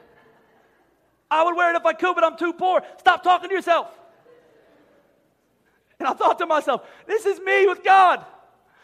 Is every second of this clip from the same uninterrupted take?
yes; 0 cuts

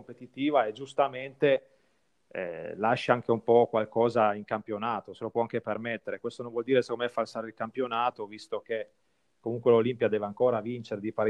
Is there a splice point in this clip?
no; 0 cuts

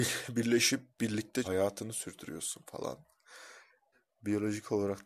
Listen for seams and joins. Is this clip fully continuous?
no; 2 cuts; at 1.4 s, 3.9 s

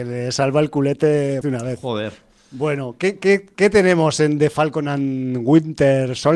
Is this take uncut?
no; 1 cut; at 1.4 s

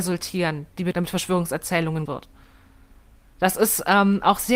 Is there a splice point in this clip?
yes; 2 cuts; at 0.9 s, 2.1 s

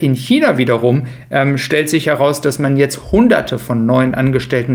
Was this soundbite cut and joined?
no; 0 cuts

